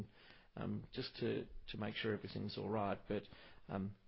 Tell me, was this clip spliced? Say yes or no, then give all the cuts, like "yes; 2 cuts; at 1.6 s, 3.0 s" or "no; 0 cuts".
no; 0 cuts